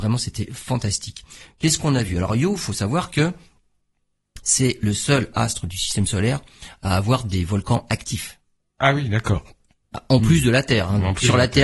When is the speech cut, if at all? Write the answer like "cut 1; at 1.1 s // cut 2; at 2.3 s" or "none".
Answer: none